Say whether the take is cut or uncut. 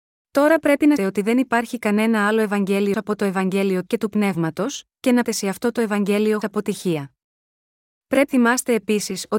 cut